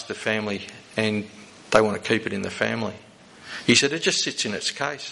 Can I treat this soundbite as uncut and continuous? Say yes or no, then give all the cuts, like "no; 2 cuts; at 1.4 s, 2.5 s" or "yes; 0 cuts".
yes; 0 cuts